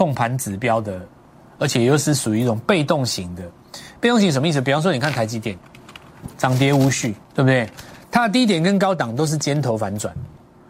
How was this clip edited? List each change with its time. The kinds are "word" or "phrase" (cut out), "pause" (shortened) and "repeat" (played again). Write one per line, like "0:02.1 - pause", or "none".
0:07.2 - pause